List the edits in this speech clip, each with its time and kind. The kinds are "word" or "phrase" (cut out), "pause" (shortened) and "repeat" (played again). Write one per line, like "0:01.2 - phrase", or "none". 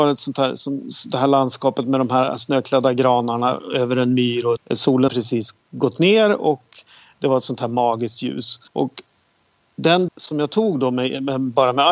0:04.6 - word
0:05.1 - word
0:08.7 - pause
0:10.1 - word